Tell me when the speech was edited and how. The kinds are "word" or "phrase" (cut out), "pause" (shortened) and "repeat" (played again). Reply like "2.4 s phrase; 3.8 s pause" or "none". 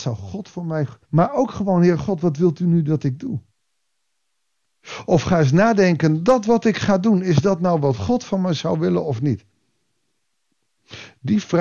1.0 s pause